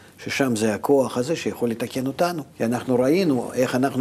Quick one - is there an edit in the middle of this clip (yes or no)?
yes